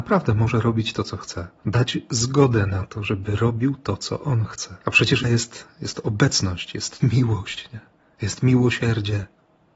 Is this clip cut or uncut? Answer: cut